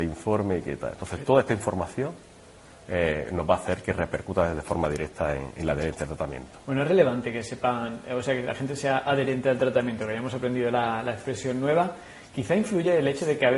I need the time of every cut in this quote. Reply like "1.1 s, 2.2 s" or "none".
none